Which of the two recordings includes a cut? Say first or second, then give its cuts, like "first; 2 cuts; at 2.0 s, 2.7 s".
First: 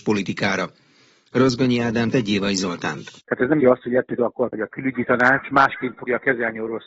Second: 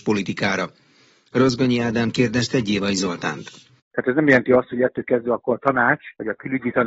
first; 5 cuts; at 2.1 s, 3.2 s, 3.6 s, 4.2 s, 4.5 s